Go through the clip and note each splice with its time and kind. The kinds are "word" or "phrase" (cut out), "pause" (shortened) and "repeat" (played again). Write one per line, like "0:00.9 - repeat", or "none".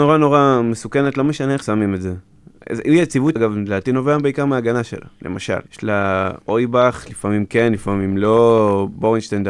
0:01.6 - word
0:03.4 - word
0:05.7 - pause
0:06.4 - pause